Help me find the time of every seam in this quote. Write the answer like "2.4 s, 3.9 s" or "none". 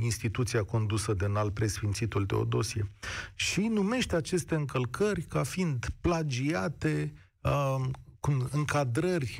none